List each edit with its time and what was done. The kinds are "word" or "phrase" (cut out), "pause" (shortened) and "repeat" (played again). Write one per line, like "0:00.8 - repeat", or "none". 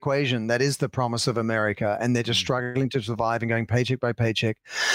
none